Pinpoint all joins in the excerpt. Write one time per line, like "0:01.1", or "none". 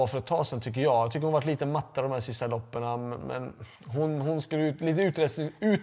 0:03.8